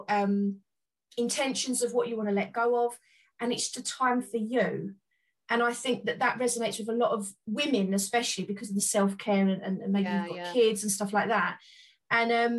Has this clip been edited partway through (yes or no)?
yes